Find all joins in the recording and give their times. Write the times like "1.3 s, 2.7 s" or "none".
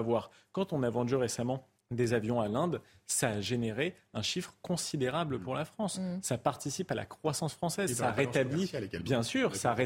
1.8 s

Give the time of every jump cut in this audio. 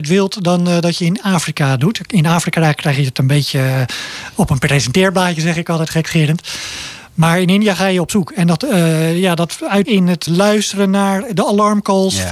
9.8 s, 10.3 s

